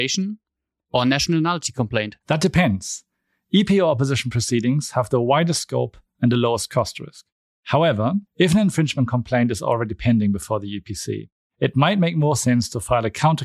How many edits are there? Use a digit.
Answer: 2